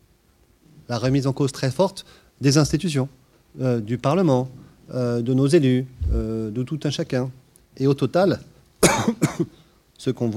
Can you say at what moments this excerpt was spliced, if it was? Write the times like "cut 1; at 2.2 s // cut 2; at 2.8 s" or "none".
none